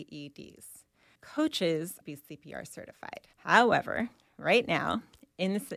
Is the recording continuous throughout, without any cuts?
no; 3 cuts; at 1.2 s, 2.0 s, 3.3 s

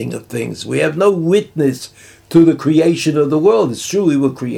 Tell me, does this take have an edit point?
no; 0 cuts

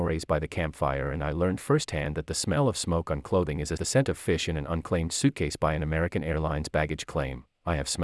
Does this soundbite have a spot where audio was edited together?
yes; 1 cut; at 3.8 s

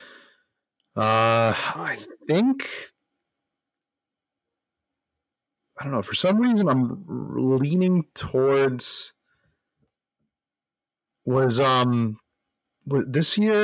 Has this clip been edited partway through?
no; 0 cuts

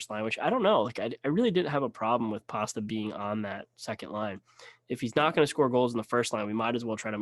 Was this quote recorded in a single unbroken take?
yes; 0 cuts

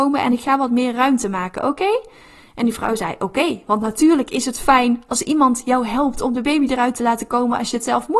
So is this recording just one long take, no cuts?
yes; 0 cuts

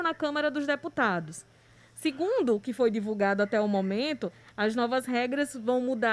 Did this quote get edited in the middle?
no; 0 cuts

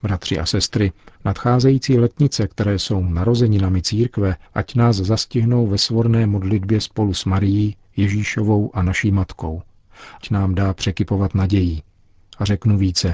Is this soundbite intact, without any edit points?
no; 3 cuts; at 1.1 s, 4.4 s, 10.2 s

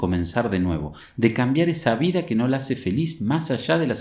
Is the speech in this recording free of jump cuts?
yes; 0 cuts

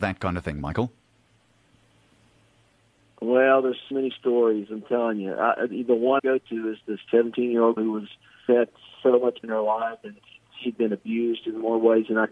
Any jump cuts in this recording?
yes; 6 cuts; at 3.9 s, 6.2 s, 7.1 s, 7.8 s, 8.5 s, 9.4 s

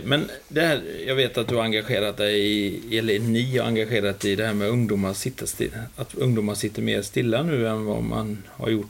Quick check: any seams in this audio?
no; 0 cuts

